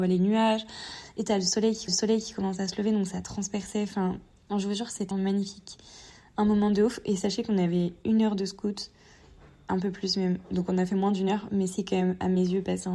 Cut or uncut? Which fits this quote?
cut